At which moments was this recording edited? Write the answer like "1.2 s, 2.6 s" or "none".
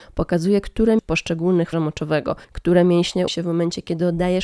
1.0 s, 1.7 s, 2.4 s, 3.3 s